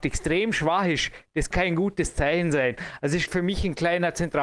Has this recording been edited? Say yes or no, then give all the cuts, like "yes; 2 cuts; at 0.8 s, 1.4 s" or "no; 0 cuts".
yes; 2 cuts; at 1.5 s, 3.3 s